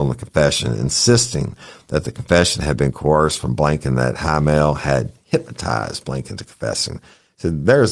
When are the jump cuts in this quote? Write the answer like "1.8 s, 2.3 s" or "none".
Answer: none